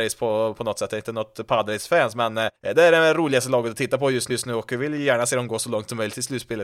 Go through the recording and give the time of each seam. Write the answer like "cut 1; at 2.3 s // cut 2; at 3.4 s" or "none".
cut 1; at 2.6 s // cut 2; at 4.3 s